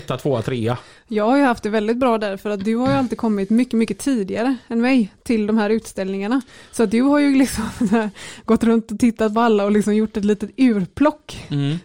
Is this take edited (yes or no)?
no